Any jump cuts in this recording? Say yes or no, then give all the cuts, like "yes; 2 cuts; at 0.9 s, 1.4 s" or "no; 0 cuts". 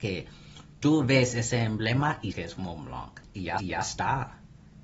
yes; 2 cuts; at 2.3 s, 3.6 s